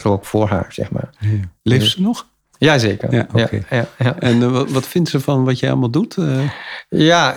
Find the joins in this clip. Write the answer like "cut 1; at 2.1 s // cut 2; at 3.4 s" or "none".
none